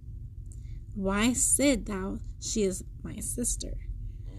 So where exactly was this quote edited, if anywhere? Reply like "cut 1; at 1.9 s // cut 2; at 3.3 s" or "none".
none